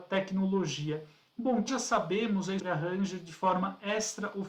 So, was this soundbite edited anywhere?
yes; 2 cuts; at 1.7 s, 2.6 s

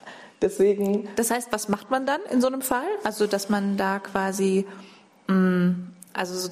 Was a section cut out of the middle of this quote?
no; 0 cuts

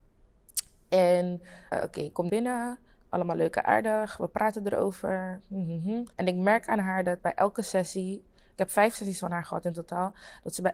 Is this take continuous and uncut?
no; 4 cuts; at 1.7 s, 2.3 s, 6.1 s, 7.2 s

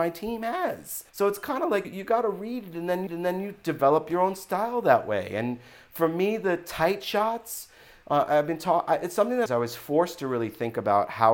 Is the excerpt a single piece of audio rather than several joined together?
no; 4 cuts; at 1.1 s, 1.8 s, 3.1 s, 9.5 s

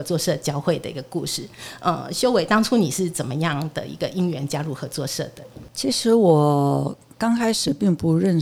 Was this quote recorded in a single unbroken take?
yes; 0 cuts

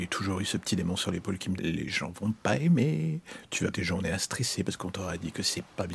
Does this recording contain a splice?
yes; 2 cuts; at 1.6 s, 3.7 s

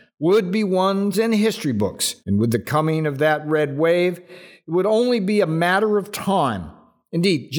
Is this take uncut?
no; 2 cuts; at 1.1 s, 2.2 s

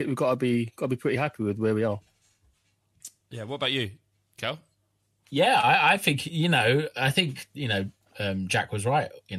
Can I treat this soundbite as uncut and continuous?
yes; 0 cuts

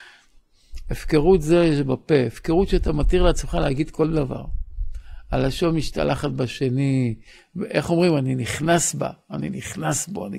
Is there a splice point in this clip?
no; 0 cuts

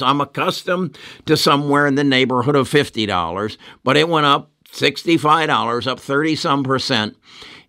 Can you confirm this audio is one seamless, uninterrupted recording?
yes; 0 cuts

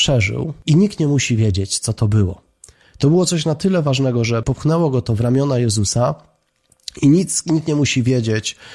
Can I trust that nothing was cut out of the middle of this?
yes; 0 cuts

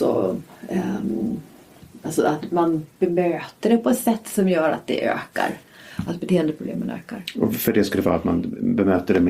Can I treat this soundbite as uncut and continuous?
yes; 0 cuts

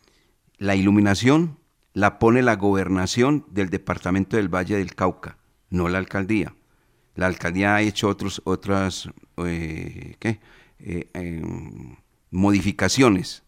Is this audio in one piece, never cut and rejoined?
yes; 0 cuts

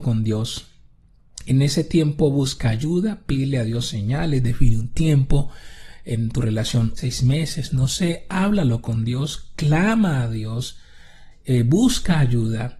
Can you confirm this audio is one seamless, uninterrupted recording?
no; 1 cut; at 7.0 s

